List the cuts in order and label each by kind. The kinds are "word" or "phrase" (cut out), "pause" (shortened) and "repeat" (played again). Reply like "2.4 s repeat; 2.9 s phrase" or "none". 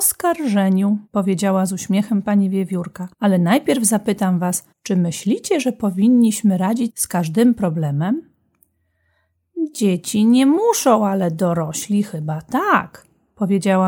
1.1 s pause; 3.1 s pause; 4.7 s pause; 6.9 s phrase